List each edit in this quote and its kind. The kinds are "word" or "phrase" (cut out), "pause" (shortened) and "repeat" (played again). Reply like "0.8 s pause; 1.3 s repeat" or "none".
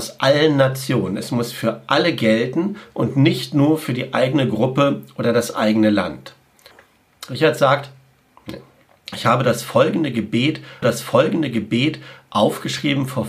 8.9 s pause; 10.8 s repeat